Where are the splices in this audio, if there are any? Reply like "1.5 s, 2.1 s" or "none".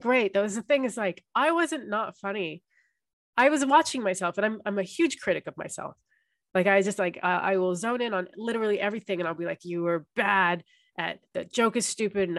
none